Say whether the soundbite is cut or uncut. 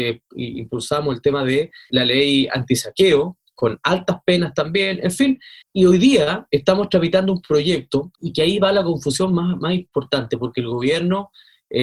cut